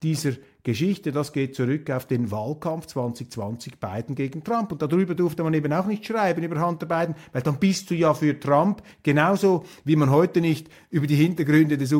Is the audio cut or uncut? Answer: uncut